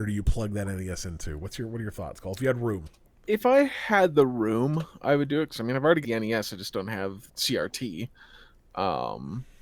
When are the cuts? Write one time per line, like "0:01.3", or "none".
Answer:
0:06.0
0:07.3